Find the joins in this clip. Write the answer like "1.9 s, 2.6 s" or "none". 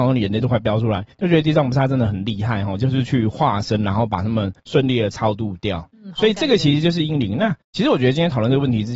1.1 s, 4.6 s, 5.9 s, 7.6 s